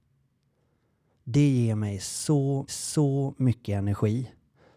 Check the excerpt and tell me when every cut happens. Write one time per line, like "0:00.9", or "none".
0:02.7